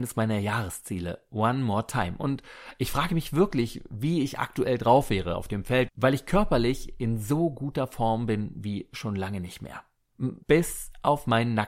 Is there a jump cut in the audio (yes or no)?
yes